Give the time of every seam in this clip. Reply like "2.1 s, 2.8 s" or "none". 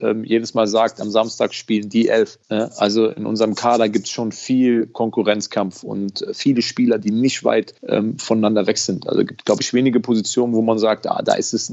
2.4 s, 7.8 s

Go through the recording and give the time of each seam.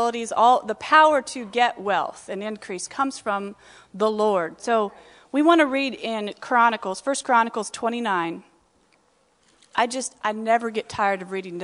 none

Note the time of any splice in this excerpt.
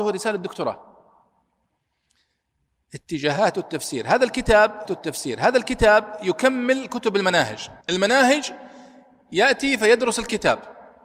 4.8 s, 7.8 s

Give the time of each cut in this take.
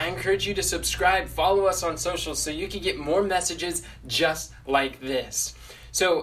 none

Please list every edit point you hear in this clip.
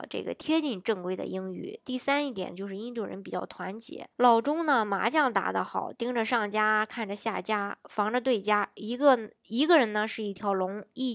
4.1 s, 9.4 s

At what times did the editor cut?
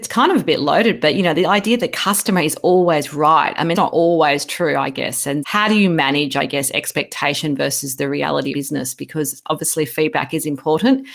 3.7 s, 5.4 s, 8.5 s

